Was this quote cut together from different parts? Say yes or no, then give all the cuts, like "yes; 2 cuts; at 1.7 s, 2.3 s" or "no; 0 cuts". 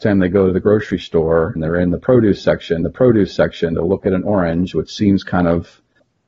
yes; 2 cuts; at 1.6 s, 2.8 s